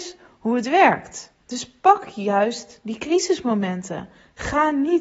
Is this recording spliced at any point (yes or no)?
yes